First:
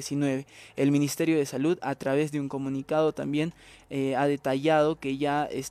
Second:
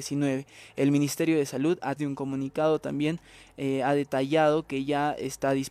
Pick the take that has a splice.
second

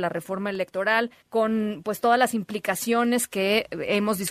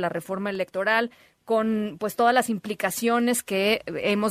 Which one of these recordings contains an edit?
first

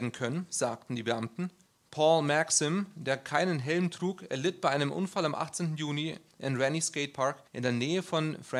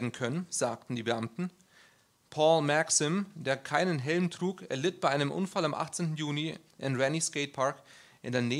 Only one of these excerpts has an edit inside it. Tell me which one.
first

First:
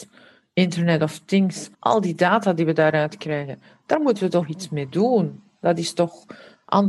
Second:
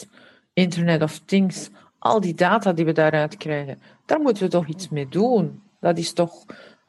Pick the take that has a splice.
first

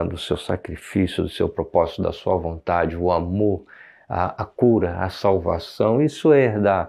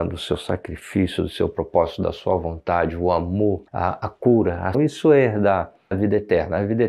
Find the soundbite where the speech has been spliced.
second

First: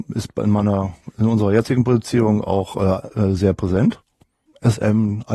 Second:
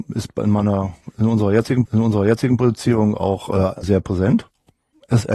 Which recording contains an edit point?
second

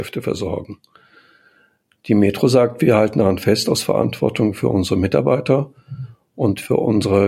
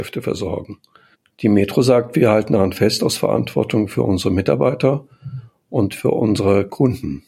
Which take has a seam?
second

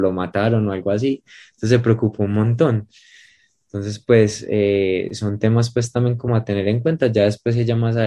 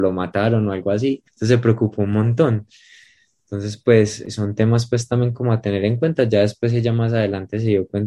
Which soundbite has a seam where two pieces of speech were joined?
second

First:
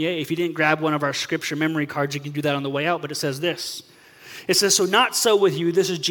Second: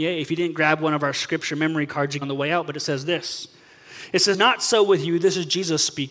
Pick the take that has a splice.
second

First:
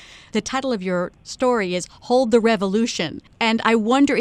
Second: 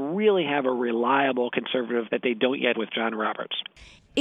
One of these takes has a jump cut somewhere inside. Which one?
second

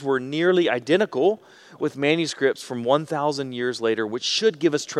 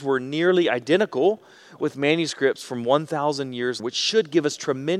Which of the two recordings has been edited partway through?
second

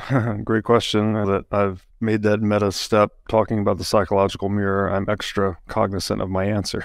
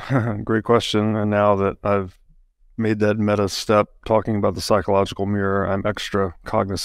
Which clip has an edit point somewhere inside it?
first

